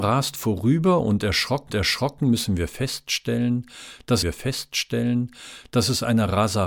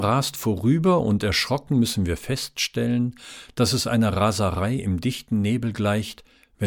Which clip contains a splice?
first; 2 cuts; at 1.7 s, 4.2 s

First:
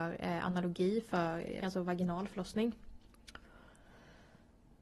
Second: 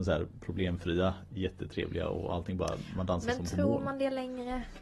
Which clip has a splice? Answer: first; 1 cut; at 1.6 s

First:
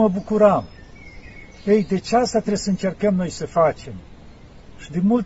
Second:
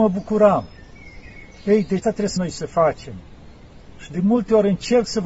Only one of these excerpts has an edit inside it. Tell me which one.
second; 2 cuts; at 2.0 s, 2.4 s

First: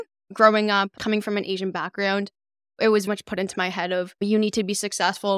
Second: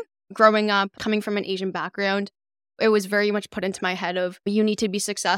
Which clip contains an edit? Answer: first; 1 cut; at 3.1 s

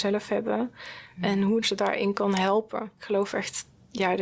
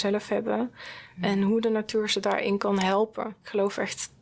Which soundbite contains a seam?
first; 1 cut; at 1.6 s

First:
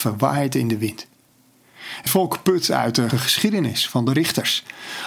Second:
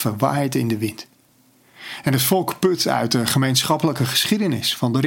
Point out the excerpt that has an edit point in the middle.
first; 2 cuts; at 2.1 s, 3.1 s

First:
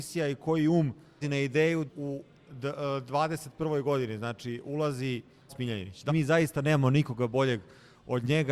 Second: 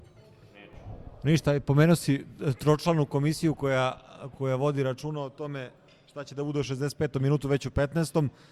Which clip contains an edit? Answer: first; 4 cuts; at 1.2 s, 1.9 s, 5.5 s, 6.1 s

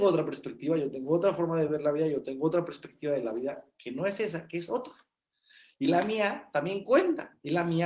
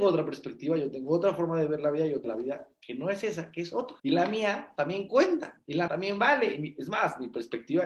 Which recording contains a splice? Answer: second; 3 cuts; at 2.2 s, 4.0 s, 5.9 s

